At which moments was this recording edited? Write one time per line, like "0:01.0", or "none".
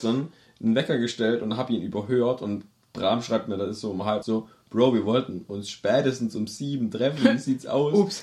0:04.2